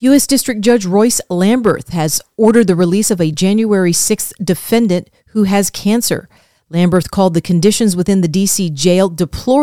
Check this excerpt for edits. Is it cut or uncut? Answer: uncut